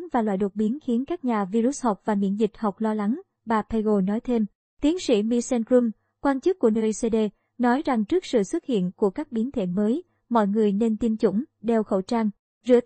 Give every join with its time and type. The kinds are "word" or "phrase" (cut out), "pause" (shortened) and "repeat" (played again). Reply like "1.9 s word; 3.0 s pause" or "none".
none